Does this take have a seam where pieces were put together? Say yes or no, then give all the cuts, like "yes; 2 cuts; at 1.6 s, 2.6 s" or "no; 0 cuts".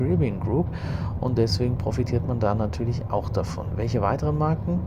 no; 0 cuts